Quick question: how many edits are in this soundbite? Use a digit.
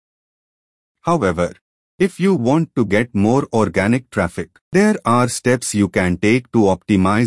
1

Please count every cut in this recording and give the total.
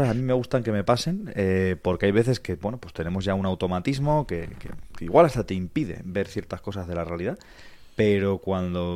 0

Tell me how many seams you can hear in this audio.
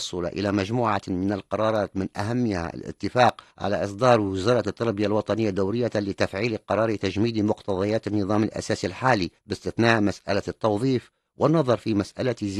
2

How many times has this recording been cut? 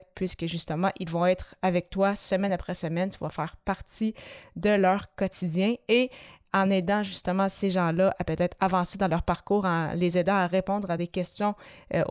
0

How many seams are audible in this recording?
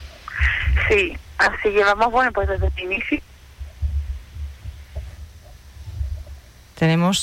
0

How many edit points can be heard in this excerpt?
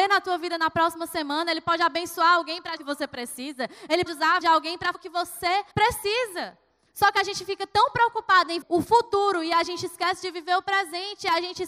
6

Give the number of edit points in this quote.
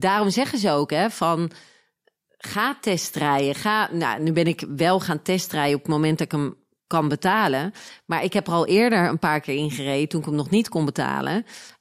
1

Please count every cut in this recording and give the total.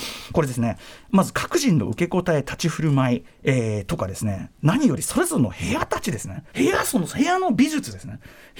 1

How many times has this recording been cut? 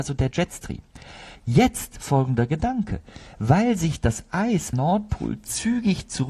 2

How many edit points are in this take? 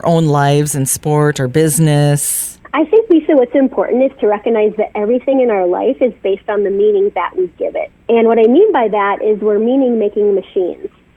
0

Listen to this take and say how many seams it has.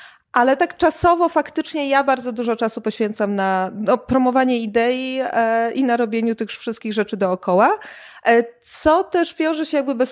0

